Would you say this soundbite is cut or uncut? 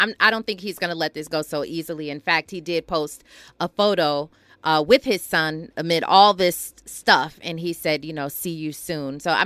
uncut